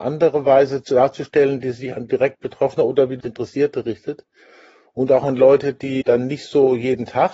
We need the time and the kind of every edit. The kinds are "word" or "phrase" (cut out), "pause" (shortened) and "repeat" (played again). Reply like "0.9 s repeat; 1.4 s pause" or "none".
3.2 s word; 6.0 s word